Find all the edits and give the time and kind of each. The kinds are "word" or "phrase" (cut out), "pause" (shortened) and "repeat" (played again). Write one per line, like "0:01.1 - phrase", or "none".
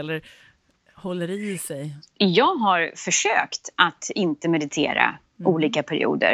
0:02.1 - pause